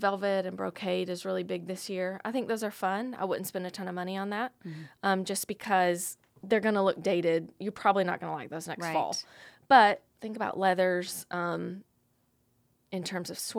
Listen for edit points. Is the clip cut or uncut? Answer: cut